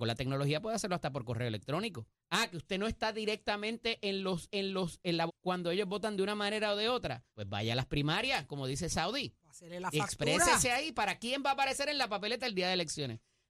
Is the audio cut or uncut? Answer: cut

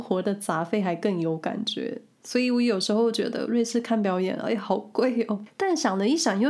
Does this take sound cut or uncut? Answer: uncut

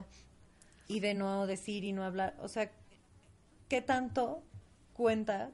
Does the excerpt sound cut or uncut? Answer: uncut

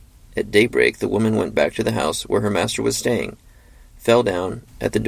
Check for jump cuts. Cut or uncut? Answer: uncut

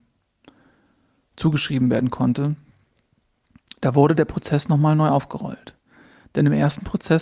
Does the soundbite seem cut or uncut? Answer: uncut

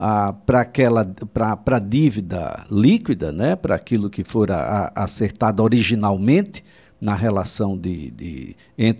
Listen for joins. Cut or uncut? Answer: uncut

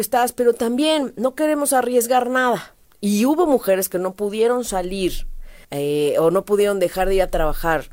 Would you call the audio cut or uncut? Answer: cut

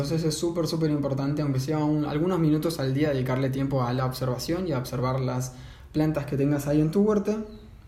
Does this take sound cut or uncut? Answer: uncut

